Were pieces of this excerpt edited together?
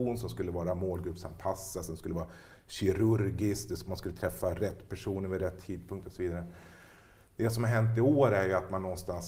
no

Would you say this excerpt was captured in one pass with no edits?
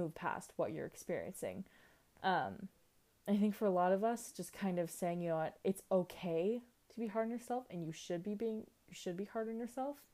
yes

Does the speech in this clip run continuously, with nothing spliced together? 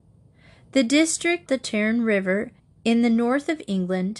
no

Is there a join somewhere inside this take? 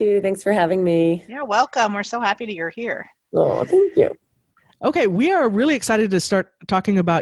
no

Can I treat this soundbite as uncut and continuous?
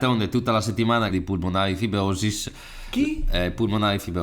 no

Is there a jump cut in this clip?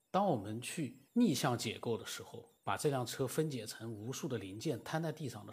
yes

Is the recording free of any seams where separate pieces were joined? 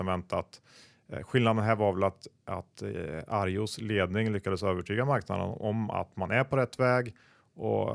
yes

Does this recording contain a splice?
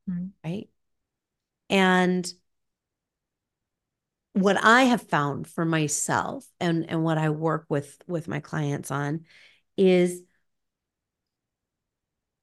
no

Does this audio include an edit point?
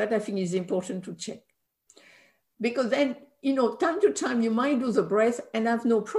no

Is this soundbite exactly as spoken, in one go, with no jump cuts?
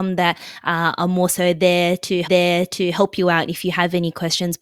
no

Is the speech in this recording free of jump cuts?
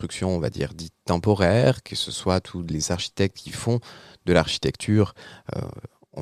yes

